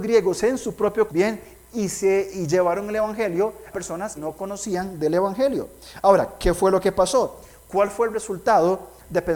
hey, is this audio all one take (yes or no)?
no